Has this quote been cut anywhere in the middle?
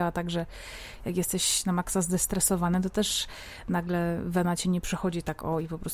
no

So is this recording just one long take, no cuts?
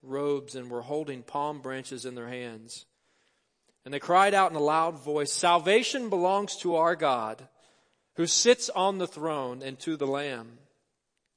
yes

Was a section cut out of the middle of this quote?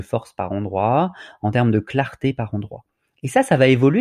no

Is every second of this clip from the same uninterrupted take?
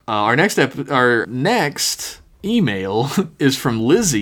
no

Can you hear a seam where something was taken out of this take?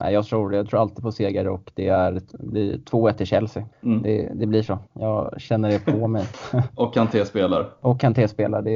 yes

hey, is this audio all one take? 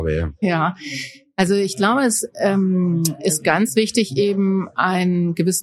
yes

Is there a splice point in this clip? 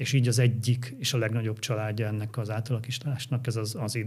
no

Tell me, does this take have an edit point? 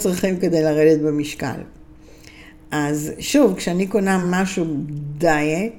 no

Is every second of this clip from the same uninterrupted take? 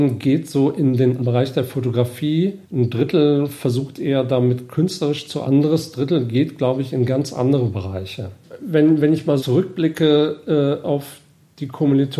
no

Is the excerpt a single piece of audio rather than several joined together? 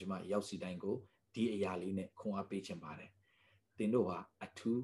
yes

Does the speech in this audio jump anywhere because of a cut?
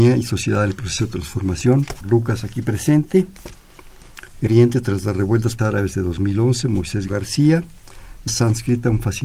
yes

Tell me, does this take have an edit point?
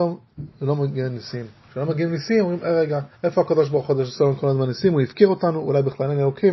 yes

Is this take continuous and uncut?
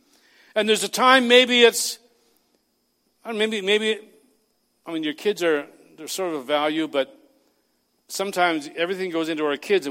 yes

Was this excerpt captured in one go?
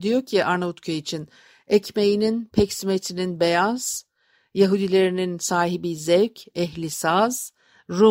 yes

